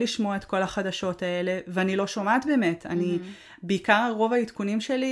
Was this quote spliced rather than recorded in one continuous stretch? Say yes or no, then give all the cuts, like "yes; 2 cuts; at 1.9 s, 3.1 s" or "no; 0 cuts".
no; 0 cuts